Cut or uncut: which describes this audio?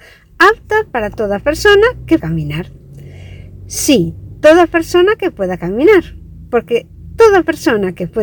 cut